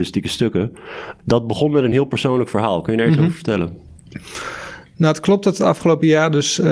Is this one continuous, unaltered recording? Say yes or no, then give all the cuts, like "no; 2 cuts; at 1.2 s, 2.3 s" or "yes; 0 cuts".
yes; 0 cuts